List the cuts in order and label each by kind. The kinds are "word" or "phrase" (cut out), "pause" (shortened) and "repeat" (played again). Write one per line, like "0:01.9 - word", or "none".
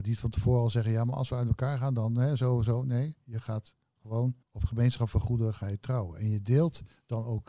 0:04.4 - pause